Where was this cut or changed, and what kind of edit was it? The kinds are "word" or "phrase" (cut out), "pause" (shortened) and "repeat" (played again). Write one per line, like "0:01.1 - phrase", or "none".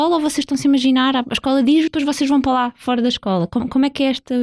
0:01.9 - word